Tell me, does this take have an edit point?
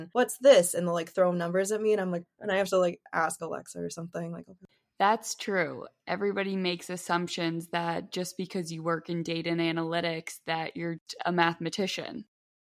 no; 0 cuts

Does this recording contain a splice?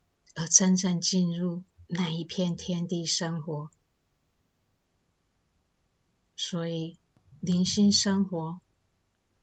no; 0 cuts

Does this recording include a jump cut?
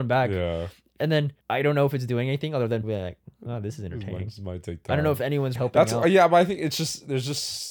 yes; 4 cuts; at 1.4 s, 2.8 s, 3.3 s, 5.5 s

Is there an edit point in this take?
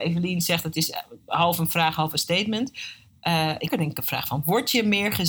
yes; 1 cut; at 3.7 s

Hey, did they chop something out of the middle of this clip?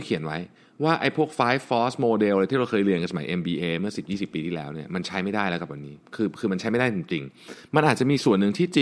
no; 0 cuts

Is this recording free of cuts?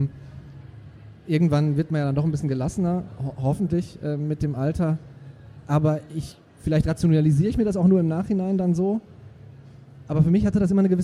yes; 0 cuts

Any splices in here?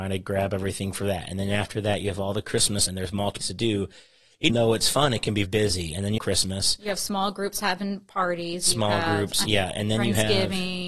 yes; 6 cuts; at 2.9 s, 3.4 s, 4.5 s, 5.4 s, 6.2 s, 9.4 s

